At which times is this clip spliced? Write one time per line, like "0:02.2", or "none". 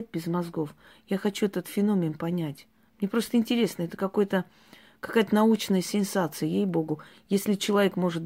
none